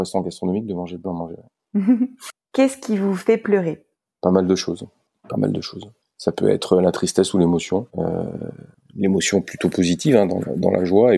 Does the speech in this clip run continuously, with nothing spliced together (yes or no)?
no